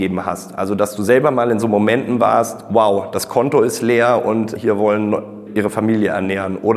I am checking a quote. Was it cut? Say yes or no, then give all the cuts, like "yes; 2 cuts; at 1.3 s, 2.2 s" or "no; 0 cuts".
yes; 1 cut; at 5.5 s